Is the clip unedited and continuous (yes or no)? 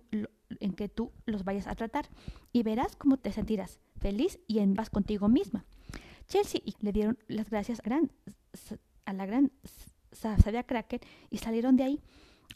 no